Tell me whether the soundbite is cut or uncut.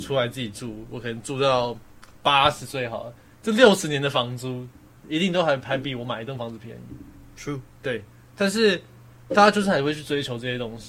uncut